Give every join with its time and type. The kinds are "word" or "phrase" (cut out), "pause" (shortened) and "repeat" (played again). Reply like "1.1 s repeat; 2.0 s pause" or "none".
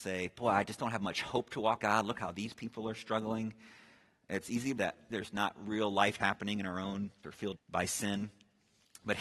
1.8 s word; 4.8 s word; 5.1 s word; 6.2 s word; 7.2 s word; 7.6 s word